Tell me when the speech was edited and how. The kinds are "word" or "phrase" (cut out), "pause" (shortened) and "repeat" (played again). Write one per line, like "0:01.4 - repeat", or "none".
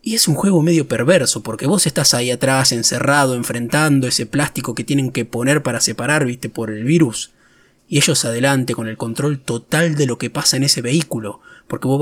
none